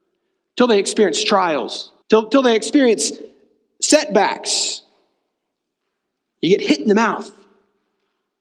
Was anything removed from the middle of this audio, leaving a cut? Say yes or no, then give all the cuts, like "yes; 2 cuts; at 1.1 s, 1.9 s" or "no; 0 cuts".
yes; 1 cut; at 2.0 s